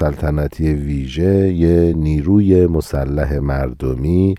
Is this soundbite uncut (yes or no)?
yes